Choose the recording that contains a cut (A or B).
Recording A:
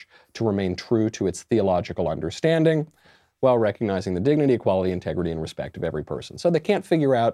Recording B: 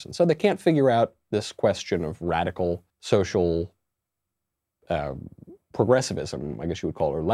B